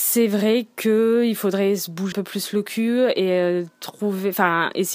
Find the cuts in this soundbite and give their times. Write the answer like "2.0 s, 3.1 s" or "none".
2.1 s